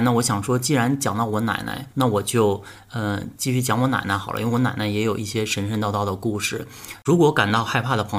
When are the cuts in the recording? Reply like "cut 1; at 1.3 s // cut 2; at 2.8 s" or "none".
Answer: cut 1; at 1.9 s